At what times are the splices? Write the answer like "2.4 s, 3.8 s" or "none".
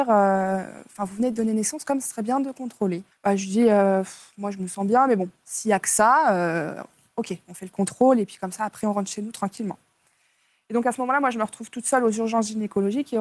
none